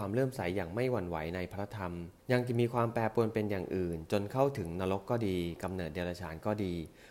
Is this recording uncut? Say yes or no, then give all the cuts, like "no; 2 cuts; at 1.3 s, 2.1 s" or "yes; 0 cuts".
no; 1 cut; at 2.2 s